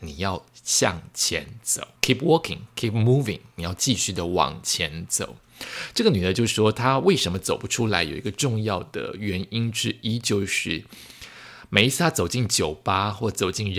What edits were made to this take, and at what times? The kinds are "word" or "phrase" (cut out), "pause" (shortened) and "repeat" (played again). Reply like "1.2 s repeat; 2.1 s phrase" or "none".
2.0 s pause